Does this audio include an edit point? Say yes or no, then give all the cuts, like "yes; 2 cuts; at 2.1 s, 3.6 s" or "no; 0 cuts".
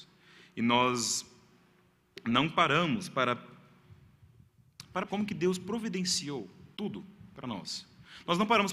yes; 2 cuts; at 5.1 s, 6.7 s